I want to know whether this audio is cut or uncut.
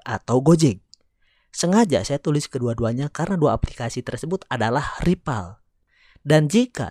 uncut